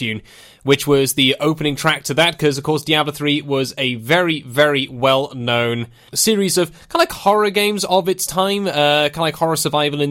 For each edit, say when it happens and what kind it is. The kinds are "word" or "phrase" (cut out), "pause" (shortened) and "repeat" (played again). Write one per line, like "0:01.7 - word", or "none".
0:06.1 - word